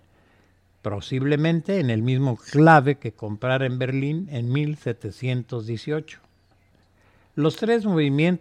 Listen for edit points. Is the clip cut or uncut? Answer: uncut